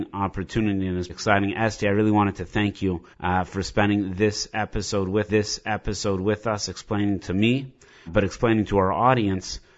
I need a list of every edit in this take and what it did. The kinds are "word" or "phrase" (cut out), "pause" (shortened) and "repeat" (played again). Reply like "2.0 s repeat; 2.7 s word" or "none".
1.1 s word; 3.1 s pause; 5.3 s repeat; 8.1 s word